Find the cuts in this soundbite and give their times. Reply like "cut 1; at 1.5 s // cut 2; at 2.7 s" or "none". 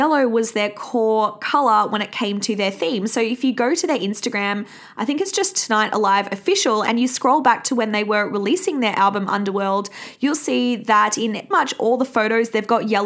cut 1; at 11.5 s

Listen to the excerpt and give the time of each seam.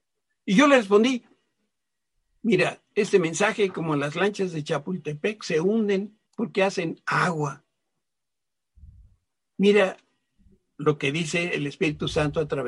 cut 1; at 6.3 s

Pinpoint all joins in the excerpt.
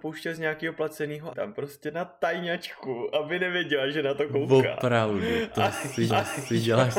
cut 1; at 1.3 s // cut 2; at 6.1 s

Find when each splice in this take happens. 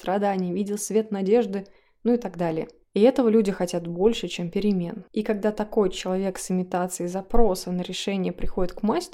none

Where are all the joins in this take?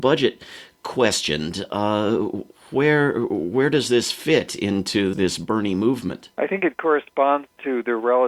cut 1; at 5.1 s // cut 2; at 6.3 s

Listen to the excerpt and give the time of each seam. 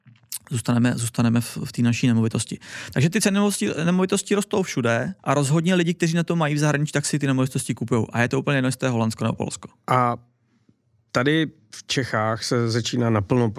cut 1; at 5.2 s

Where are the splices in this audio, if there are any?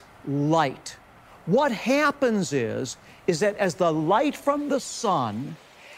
none

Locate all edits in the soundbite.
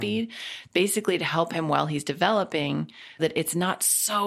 cut 1; at 3.2 s

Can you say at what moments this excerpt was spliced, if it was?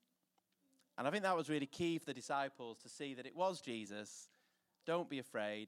none

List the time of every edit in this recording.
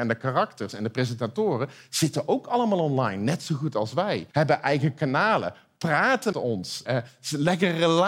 cut 1; at 4.3 s // cut 2; at 6.3 s // cut 3; at 6.9 s

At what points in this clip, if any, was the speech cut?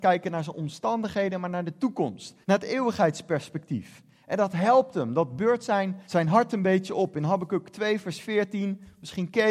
cut 1; at 2.4 s // cut 2; at 6.0 s

